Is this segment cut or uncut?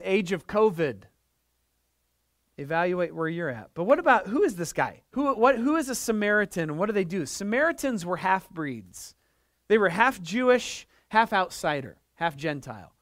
cut